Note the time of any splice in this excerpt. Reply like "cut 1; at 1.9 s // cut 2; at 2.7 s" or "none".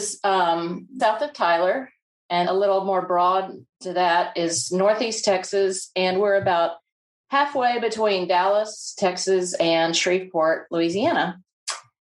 cut 1; at 1.0 s // cut 2; at 2.4 s